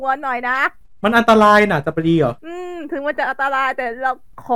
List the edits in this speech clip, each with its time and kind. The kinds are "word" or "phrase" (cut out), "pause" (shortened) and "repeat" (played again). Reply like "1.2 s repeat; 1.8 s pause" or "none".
2.4 s pause